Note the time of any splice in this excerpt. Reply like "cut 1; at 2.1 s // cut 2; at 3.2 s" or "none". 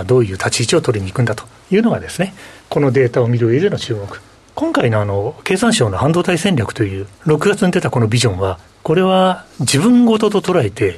cut 1; at 4.4 s // cut 2; at 7.1 s // cut 3; at 8.7 s